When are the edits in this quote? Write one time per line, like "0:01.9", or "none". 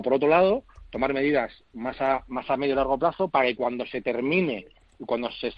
none